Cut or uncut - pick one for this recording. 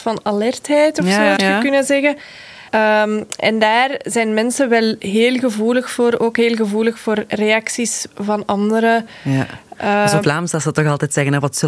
cut